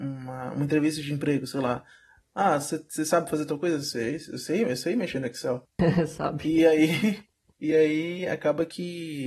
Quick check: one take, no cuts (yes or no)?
yes